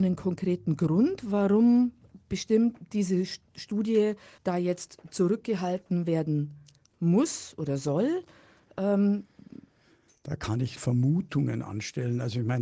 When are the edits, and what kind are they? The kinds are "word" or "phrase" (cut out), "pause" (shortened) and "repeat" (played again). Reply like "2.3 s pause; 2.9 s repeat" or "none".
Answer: 4.4 s pause; 10.8 s word